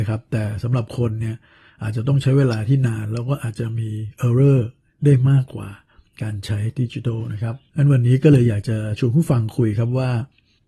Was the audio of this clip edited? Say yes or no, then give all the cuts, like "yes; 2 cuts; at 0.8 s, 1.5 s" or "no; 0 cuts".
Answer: no; 0 cuts